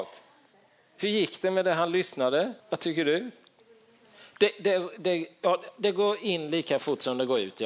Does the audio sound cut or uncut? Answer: cut